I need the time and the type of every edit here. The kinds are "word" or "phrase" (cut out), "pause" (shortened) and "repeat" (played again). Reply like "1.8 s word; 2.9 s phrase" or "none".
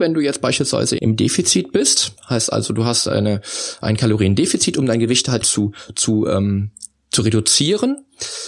1.0 s word; 2.2 s pause; 5.4 s word